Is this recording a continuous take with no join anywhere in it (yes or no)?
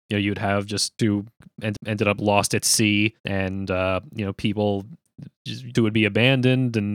no